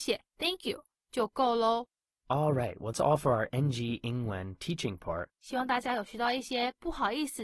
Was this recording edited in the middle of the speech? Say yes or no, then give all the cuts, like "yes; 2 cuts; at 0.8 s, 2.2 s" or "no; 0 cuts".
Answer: yes; 2 cuts; at 2.9 s, 5.3 s